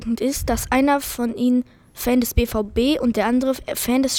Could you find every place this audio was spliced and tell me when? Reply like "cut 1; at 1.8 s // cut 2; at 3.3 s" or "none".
none